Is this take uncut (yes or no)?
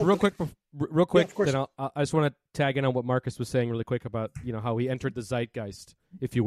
yes